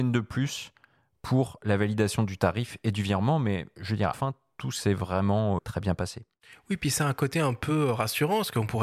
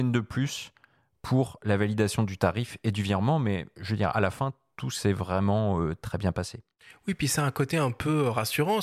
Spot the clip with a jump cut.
first; 2 cuts; at 4.1 s, 5.6 s

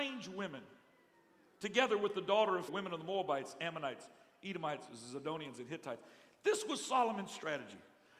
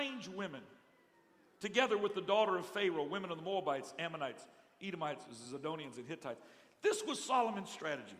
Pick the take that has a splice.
first; 1 cut; at 2.7 s

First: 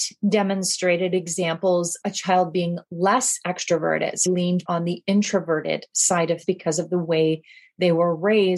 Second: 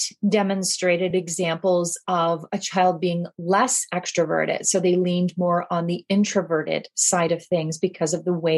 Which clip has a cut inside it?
first; 4 cuts; at 2.0 s, 4.3 s, 4.7 s, 6.4 s

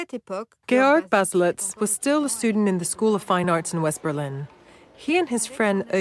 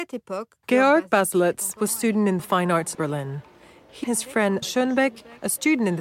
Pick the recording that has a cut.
second; 5 cuts; at 1.9 s, 2.4 s, 2.9 s, 4.0 s, 4.6 s

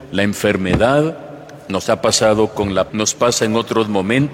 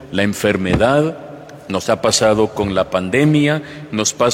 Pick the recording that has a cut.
first; 1 cut; at 2.9 s

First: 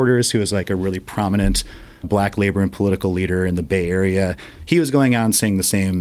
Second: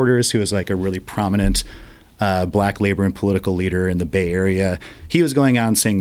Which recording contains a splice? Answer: first; 1 cut; at 2.0 s

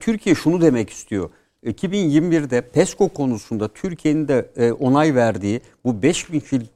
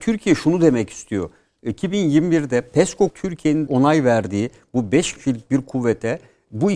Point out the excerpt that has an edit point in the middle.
second; 3 cuts; at 3.1 s, 3.7 s, 5.2 s

